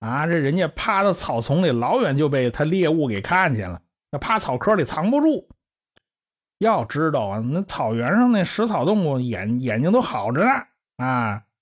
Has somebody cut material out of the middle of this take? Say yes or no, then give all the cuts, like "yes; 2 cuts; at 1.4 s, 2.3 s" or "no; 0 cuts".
no; 0 cuts